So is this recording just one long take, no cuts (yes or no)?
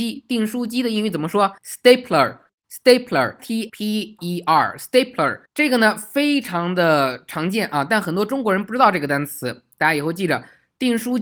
no